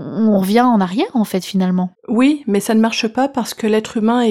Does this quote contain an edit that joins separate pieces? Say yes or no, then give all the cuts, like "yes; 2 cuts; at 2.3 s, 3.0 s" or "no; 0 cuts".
yes; 1 cut; at 1.9 s